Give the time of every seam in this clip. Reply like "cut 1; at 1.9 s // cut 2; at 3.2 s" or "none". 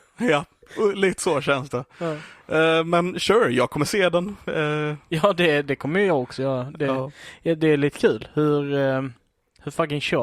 none